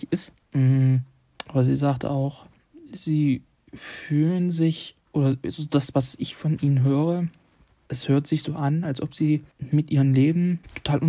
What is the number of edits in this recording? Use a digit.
0